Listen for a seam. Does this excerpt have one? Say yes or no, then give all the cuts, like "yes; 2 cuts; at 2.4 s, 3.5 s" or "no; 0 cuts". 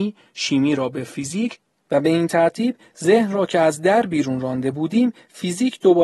no; 0 cuts